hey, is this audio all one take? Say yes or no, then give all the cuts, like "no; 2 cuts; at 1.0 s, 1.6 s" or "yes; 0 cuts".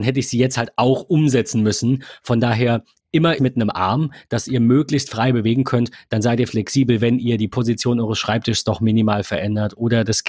no; 1 cut; at 3.4 s